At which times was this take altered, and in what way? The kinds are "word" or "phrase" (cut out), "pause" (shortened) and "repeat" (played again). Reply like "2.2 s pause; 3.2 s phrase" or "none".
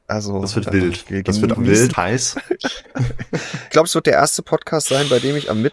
1.5 s word; 1.9 s word; 3.7 s phrase